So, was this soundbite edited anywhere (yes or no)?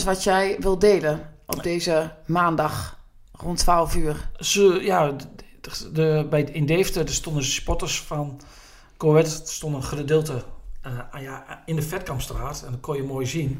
no